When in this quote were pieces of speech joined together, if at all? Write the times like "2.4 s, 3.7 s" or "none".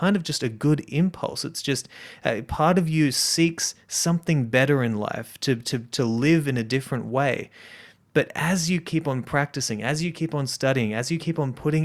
none